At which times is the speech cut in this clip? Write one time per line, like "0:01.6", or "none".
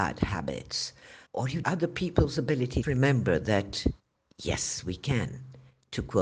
0:01.3
0:01.6
0:02.8